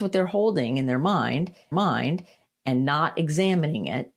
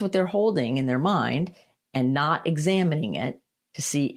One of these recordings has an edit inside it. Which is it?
first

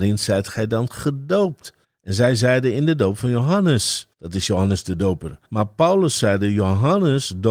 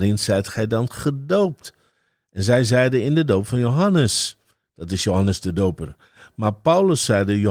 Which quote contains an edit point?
first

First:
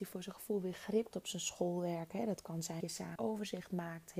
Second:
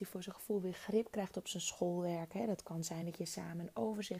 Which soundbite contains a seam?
first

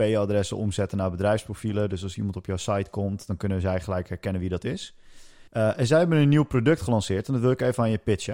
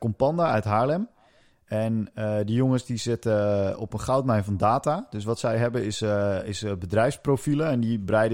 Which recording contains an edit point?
first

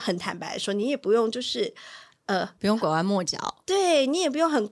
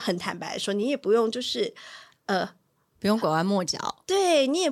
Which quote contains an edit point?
first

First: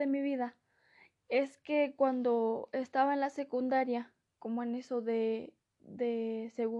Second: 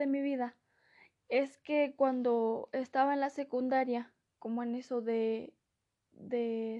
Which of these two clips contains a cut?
first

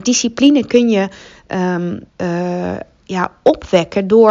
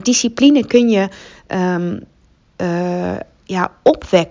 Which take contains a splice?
first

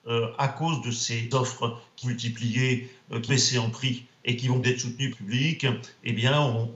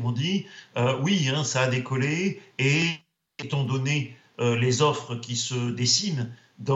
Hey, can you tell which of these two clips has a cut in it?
first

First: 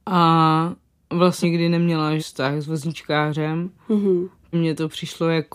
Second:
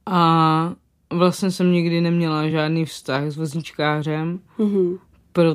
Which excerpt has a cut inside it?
first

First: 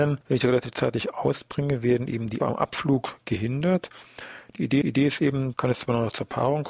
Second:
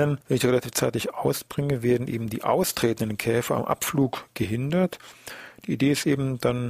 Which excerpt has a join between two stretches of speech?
first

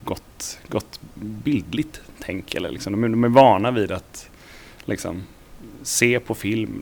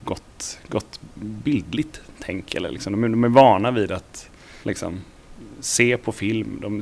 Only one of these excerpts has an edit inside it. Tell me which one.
second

